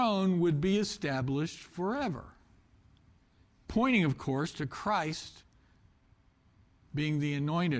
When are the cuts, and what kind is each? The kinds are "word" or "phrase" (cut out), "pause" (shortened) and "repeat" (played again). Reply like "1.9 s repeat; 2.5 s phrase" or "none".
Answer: none